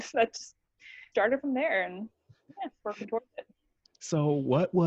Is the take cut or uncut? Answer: cut